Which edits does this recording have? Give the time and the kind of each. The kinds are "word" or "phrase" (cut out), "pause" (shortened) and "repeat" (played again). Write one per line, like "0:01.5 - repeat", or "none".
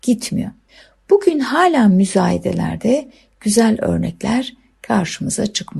none

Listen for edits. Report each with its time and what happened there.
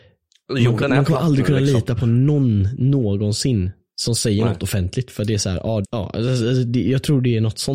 0:05.8 - phrase

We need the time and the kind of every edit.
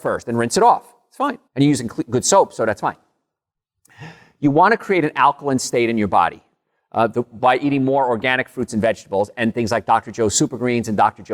0:01.5 - pause

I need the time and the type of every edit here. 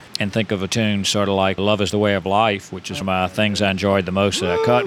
0:01.6 - word
0:03.0 - word

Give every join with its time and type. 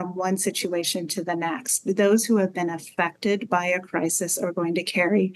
none

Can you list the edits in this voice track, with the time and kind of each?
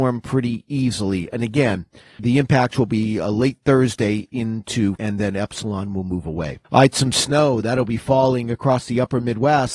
0:02.2 - word
0:05.0 - word
0:06.6 - pause

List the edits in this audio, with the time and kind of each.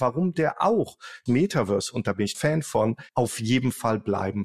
0:01.3 - word
0:02.3 - word
0:03.1 - pause

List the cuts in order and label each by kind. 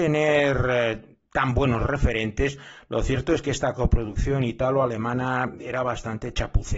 none

